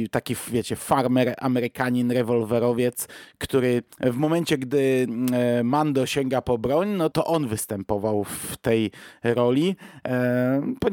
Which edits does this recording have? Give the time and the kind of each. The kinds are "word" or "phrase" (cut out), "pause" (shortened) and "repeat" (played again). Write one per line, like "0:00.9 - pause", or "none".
0:03.9 - pause
0:07.1 - phrase

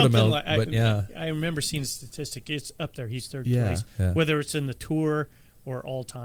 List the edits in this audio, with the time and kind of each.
none

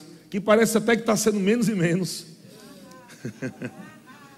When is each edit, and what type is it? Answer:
none

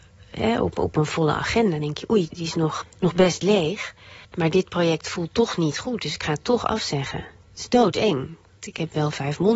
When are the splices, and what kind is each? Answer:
0:02.3 - word
0:02.8 - word
0:04.2 - pause

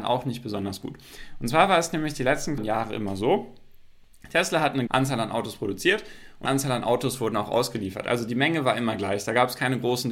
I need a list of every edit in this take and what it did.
0:02.6 - word
0:04.9 - word
0:06.5 - word

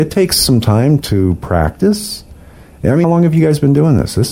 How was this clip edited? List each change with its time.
0:01.0 - word
0:03.0 - word

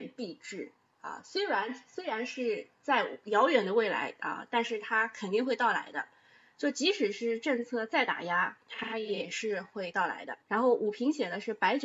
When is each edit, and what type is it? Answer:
0:10.4 - pause

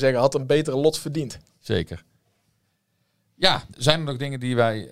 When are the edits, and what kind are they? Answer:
0:03.7 - word

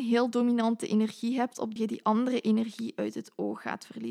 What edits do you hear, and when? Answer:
0:01.8 - phrase

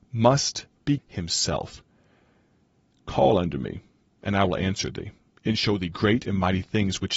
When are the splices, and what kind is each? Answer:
0:01.0 - word

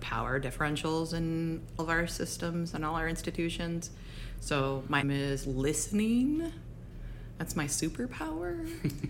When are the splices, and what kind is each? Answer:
0:01.8 - word
0:05.0 - word

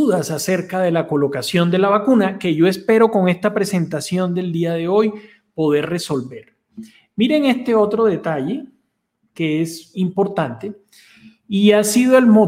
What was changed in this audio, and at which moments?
0:09.9 - word

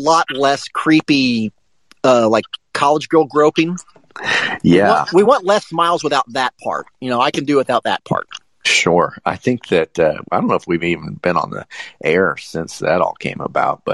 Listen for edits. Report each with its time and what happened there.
none

